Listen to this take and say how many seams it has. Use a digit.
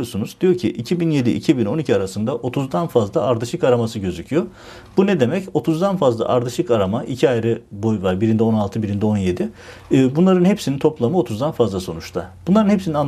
0